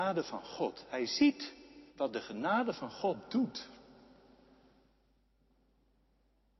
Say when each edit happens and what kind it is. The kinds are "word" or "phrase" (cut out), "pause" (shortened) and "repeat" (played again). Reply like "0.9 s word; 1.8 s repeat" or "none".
1.9 s pause

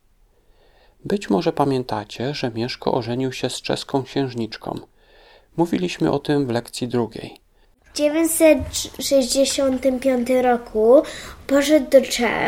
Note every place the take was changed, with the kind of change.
none

